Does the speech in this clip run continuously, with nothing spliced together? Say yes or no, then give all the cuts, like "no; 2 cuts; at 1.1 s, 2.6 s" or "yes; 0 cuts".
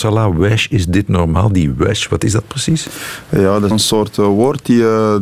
no; 1 cut; at 3.7 s